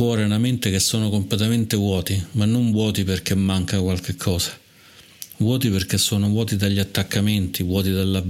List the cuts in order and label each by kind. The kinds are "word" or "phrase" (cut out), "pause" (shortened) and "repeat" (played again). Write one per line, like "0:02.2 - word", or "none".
none